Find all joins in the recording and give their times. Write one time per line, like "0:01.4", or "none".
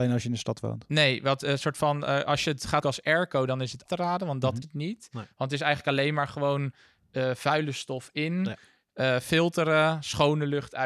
0:02.8
0:03.9
0:04.6